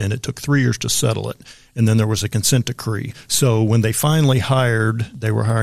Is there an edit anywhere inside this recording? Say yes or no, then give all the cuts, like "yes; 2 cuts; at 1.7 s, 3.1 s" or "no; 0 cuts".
no; 0 cuts